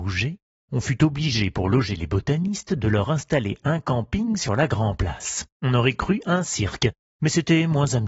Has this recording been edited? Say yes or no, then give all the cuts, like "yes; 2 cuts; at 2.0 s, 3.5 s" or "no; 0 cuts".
yes; 1 cut; at 5.5 s